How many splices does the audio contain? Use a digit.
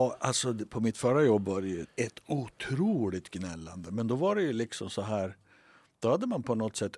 0